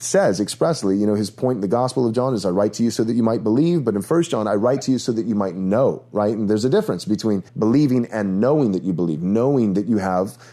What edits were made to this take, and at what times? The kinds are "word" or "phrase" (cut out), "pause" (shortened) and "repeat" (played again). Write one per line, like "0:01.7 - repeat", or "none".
0:07.5 - pause